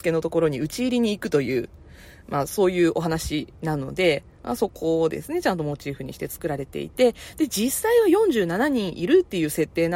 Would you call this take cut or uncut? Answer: uncut